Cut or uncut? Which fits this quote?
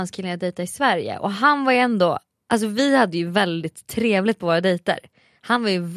uncut